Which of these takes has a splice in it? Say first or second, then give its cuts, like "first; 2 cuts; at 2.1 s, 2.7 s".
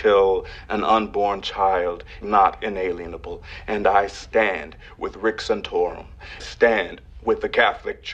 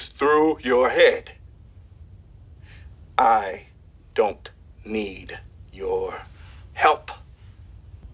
first; 2 cuts; at 2.2 s, 6.4 s